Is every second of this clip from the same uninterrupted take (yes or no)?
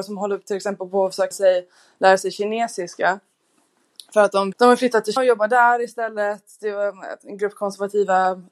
no